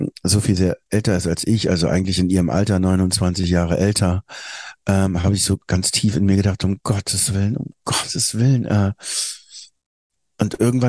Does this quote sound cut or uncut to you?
uncut